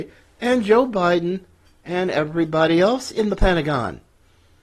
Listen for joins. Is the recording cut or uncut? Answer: uncut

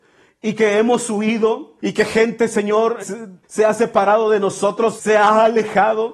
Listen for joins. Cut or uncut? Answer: cut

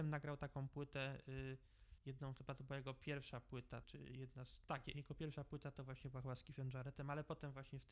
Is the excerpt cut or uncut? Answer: cut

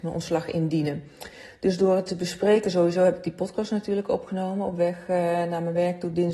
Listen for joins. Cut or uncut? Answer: uncut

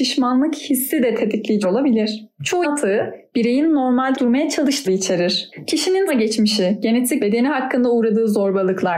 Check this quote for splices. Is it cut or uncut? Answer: cut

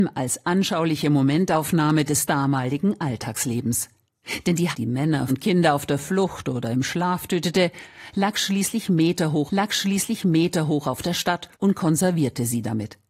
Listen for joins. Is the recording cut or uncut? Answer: cut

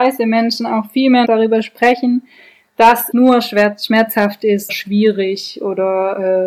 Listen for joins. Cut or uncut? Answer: cut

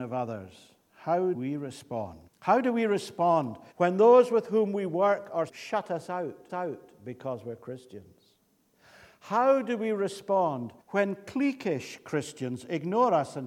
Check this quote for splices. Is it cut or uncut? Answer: cut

